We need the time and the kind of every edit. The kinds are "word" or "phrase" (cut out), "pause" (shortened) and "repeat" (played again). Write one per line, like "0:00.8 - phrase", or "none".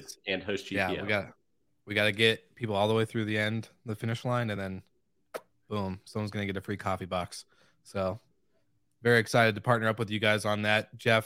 none